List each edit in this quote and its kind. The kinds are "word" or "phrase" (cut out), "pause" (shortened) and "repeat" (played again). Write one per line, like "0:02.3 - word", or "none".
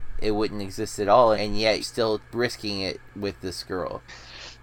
0:01.3 - word
0:01.8 - word
0:02.2 - pause
0:03.1 - pause